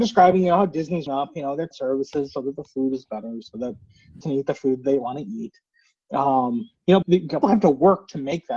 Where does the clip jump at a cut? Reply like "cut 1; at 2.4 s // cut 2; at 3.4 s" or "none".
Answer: cut 1; at 1.1 s // cut 2; at 1.7 s // cut 3; at 4.2 s // cut 4; at 7.0 s // cut 5; at 7.4 s

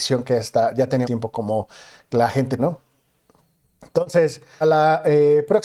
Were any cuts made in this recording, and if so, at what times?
cut 1; at 1.0 s // cut 2; at 2.6 s // cut 3; at 4.6 s

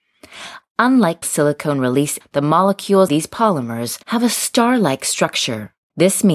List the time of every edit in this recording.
cut 1; at 1.2 s // cut 2; at 2.2 s // cut 3; at 3.1 s // cut 4; at 4.0 s

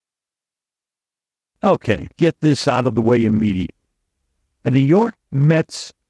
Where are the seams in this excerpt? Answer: cut 1; at 2.1 s

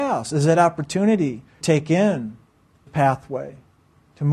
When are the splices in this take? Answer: cut 1; at 1.6 s // cut 2; at 2.9 s

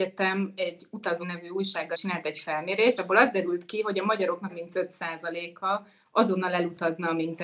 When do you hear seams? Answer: cut 1; at 1.2 s // cut 2; at 1.9 s // cut 3; at 3.0 s // cut 4; at 4.5 s

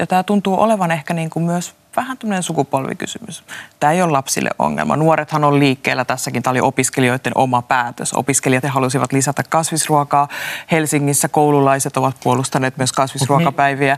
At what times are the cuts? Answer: cut 1; at 8.6 s

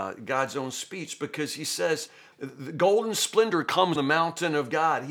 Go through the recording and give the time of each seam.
cut 1; at 2.3 s // cut 2; at 4.0 s

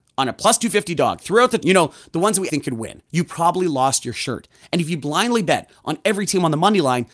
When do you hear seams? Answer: cut 1; at 1.6 s // cut 2; at 2.5 s // cut 3; at 3.1 s

